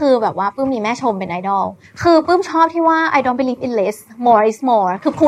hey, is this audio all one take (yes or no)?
yes